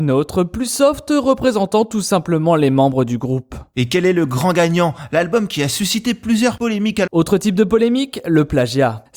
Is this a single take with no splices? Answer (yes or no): no